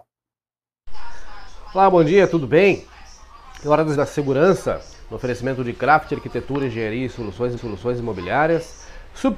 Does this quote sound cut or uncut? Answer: cut